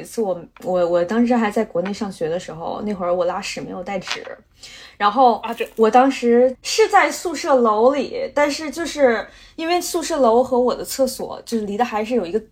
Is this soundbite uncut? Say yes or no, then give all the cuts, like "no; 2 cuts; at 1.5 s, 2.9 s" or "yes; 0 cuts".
yes; 0 cuts